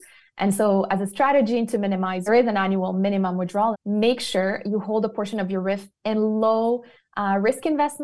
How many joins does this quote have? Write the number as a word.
two